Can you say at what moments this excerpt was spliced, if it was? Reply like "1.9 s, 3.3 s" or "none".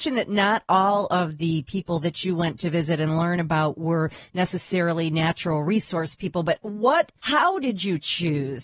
7.2 s